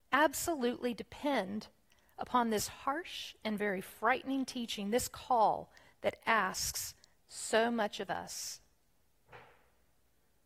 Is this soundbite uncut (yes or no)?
yes